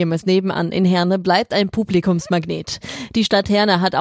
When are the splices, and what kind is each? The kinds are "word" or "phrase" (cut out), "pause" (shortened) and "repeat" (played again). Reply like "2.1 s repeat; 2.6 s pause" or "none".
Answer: none